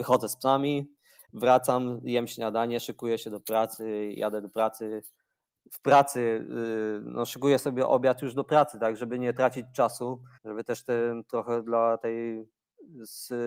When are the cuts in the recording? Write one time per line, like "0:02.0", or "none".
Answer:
0:01.2
0:10.4